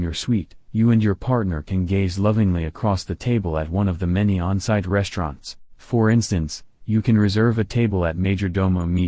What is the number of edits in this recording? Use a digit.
1